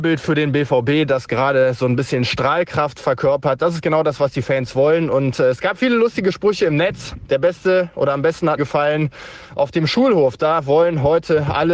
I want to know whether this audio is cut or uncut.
cut